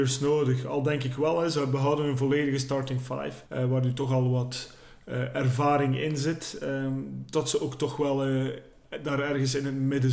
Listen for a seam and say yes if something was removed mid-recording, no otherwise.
yes